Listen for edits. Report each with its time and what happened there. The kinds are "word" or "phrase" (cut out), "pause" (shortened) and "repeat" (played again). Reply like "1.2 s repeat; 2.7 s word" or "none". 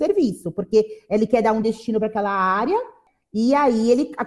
none

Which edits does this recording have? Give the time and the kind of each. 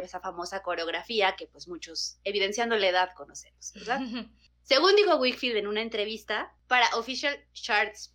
none

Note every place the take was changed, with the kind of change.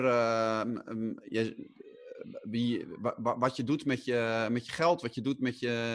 1.2 s word

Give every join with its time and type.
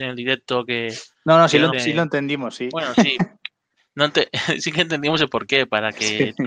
1.7 s word

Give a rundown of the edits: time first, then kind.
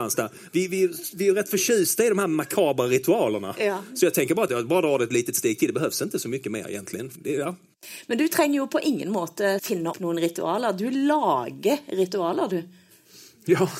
4.5 s word; 7.1 s word; 9.6 s word; 9.9 s word

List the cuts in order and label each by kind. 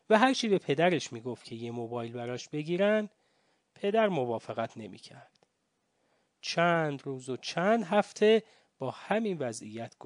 none

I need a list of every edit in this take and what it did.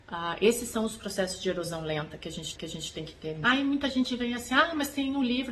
2.6 s repeat

